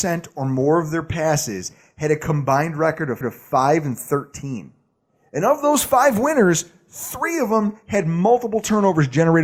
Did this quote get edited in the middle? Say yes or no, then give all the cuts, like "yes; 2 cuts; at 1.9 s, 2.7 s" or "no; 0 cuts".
yes; 1 cut; at 3.2 s